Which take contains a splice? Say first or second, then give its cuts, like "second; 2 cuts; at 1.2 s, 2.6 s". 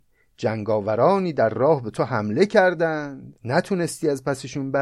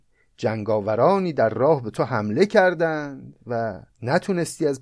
first; 1 cut; at 3.4 s